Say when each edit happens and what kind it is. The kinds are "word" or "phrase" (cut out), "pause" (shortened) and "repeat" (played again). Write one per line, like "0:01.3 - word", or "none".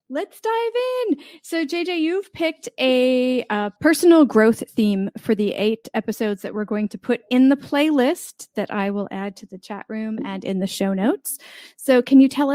0:03.8 - pause